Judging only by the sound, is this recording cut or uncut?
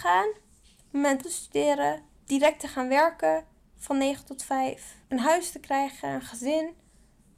cut